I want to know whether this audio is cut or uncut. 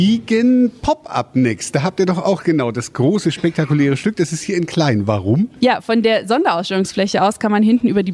uncut